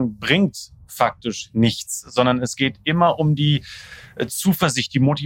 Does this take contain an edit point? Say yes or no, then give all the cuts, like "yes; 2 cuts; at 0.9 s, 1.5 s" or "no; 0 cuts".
no; 0 cuts